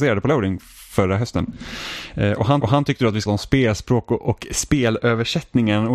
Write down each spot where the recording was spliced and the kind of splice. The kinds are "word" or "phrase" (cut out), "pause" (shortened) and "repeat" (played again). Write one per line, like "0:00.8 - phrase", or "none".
0:02.6 - repeat
0:03.3 - word